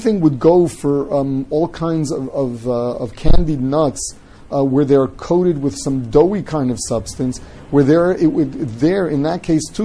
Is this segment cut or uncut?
uncut